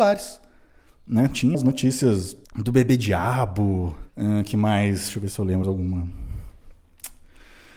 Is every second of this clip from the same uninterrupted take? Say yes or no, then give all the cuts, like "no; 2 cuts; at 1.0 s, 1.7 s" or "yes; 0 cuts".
no; 4 cuts; at 1.5 s, 2.4 s, 4.1 s, 5.6 s